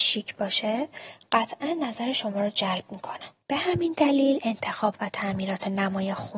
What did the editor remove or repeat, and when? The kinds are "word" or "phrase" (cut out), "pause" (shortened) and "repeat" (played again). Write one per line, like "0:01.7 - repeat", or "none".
0:03.4 - pause